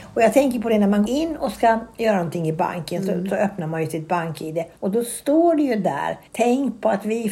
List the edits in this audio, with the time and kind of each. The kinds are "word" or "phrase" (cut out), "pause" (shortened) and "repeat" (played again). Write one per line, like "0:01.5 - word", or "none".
0:01.1 - word
0:04.8 - pause
0:06.3 - pause